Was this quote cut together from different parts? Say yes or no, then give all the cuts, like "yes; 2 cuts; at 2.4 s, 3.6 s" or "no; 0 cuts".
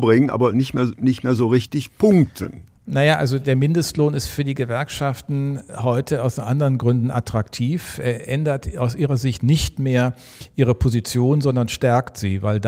yes; 1 cut; at 2.8 s